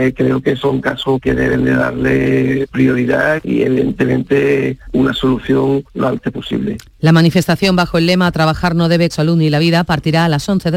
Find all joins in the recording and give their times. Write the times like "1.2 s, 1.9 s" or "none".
5.9 s, 9.1 s